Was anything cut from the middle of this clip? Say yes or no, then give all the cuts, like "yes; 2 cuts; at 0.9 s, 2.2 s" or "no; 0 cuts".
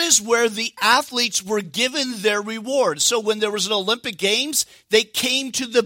no; 0 cuts